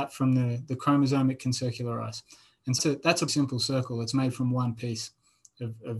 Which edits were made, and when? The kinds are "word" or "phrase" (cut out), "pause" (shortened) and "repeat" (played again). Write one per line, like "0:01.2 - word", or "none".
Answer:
0:02.8 - word
0:03.3 - word